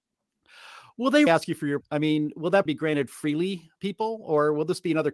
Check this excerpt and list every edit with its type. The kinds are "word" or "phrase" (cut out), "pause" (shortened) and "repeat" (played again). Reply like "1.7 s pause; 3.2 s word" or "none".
1.3 s word; 1.8 s word; 2.7 s word; 3.8 s word